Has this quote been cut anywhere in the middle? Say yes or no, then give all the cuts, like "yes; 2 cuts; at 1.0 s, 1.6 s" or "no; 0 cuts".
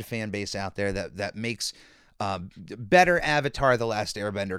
no; 0 cuts